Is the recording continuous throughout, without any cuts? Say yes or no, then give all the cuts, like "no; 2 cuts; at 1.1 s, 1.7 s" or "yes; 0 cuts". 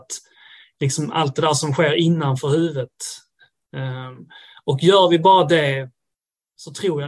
yes; 0 cuts